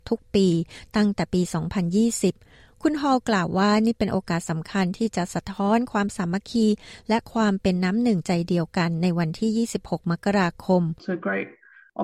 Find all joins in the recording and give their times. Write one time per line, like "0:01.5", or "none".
0:11.0